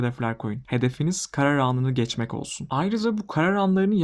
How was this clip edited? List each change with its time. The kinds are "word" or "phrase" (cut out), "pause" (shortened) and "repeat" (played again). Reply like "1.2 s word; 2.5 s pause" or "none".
none